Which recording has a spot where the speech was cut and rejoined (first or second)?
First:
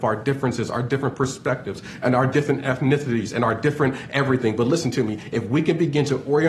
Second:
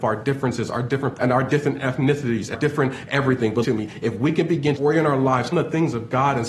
second